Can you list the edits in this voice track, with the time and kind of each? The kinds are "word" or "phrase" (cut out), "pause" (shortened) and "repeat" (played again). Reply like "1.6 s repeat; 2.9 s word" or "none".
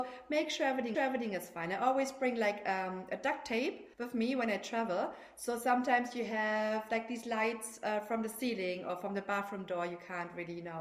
0.9 s repeat; 3.9 s pause